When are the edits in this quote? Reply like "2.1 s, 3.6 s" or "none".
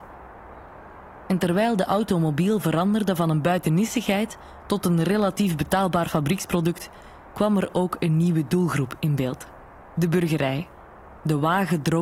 none